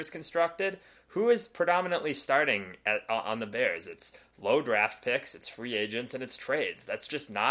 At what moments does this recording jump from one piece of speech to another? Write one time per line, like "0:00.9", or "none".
none

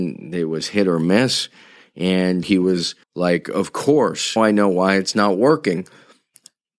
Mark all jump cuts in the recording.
0:02.4
0:03.0
0:04.4

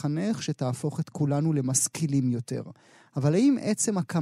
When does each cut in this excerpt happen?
none

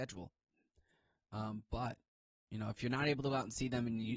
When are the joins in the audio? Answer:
0:02.8

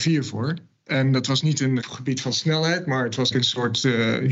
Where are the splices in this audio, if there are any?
0:01.8
0:03.3

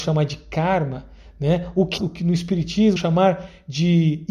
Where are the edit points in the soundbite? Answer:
0:02.0
0:03.0

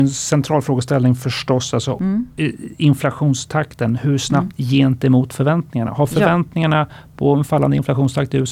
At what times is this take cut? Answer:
0:04.5

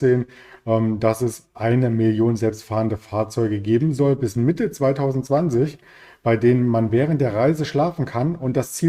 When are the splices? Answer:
none

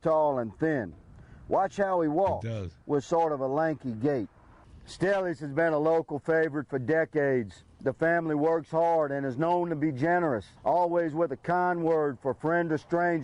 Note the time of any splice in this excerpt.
0:10.6

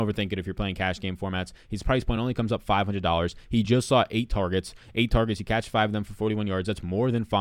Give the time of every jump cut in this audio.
none

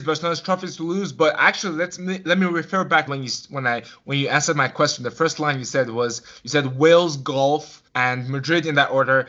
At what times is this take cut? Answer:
0:03.1
0:07.9

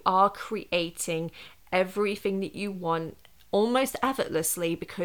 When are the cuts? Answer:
none

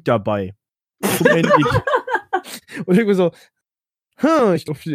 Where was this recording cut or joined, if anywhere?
none

